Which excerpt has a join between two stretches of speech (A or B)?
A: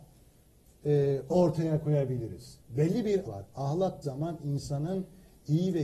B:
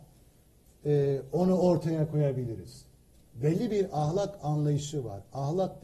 A